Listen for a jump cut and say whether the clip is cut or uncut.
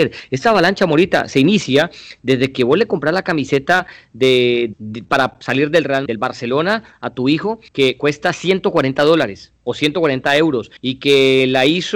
cut